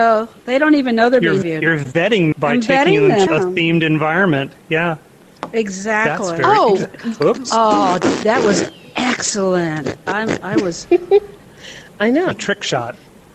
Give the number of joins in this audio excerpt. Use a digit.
5